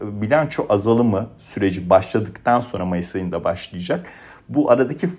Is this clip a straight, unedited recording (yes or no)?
yes